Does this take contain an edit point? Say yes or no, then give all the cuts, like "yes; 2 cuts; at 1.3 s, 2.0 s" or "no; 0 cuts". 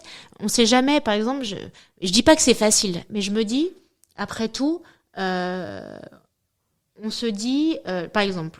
no; 0 cuts